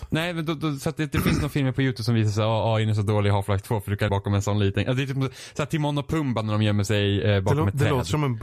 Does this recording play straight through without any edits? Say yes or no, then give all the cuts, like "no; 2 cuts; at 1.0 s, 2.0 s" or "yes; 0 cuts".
no; 1 cut; at 4.1 s